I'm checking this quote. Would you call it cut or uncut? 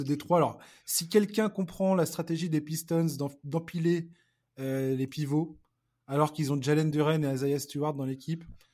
uncut